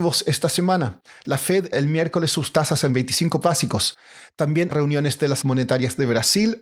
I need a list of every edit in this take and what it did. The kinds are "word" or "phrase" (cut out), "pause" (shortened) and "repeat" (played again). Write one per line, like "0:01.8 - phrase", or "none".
0:01.7 - word
0:03.4 - word
0:04.7 - word
0:05.4 - word